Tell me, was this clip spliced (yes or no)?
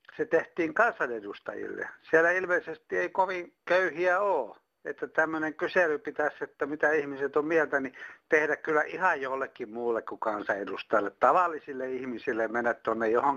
no